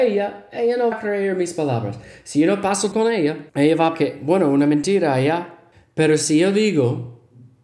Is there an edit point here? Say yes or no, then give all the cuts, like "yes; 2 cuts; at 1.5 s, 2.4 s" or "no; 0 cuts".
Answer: yes; 5 cuts; at 0.9 s, 2.9 s, 3.5 s, 3.9 s, 5.7 s